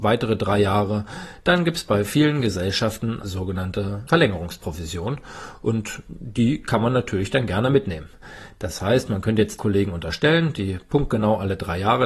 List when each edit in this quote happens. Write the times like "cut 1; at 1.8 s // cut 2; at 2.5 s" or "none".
cut 1; at 3.2 s // cut 2; at 9.6 s